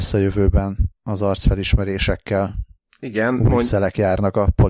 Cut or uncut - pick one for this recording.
cut